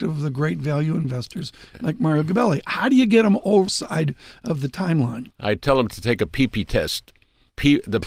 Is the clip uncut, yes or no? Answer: no